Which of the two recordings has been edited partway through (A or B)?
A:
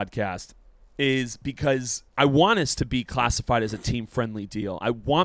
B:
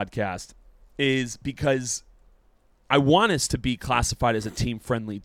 A